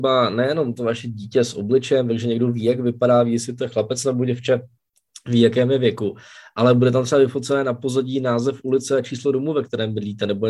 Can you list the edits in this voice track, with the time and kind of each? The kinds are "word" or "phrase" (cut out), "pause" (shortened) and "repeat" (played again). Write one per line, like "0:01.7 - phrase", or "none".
none